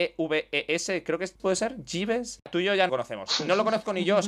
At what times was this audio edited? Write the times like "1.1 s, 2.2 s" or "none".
1.4 s, 2.9 s